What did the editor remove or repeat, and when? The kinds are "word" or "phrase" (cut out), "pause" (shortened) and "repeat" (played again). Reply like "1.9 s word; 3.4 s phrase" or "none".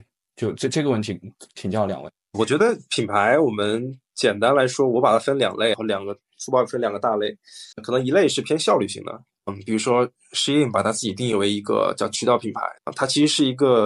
7.7 s pause; 12.8 s pause